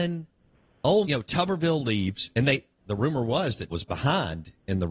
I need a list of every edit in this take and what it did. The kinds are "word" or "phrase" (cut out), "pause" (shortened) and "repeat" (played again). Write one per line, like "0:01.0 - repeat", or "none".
0:01.0 - word
0:03.7 - word